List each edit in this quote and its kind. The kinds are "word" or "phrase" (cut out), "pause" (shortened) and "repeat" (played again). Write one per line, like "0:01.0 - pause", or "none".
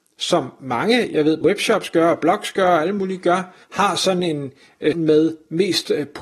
0:01.4 - word
0:03.6 - pause
0:04.9 - word